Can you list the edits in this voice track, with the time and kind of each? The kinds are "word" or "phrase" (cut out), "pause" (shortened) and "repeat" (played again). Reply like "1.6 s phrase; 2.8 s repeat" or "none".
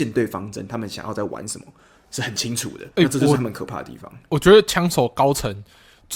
2.9 s pause